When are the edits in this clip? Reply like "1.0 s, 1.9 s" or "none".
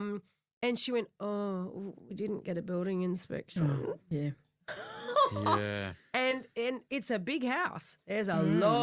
none